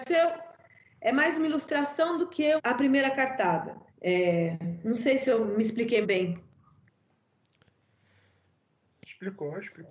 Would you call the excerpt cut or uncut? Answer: cut